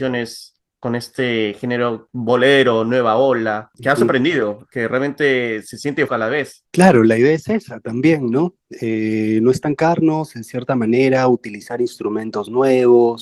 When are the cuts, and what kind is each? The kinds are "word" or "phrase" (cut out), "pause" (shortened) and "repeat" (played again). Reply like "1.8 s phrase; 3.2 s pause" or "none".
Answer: 6.1 s word